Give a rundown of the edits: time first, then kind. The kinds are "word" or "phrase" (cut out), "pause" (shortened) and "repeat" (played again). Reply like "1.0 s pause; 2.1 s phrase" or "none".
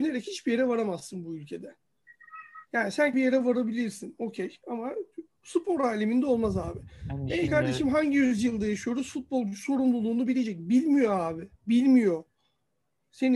3.1 s phrase; 7.5 s word; 11.6 s pause